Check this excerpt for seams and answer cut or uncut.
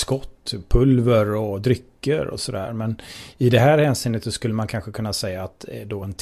uncut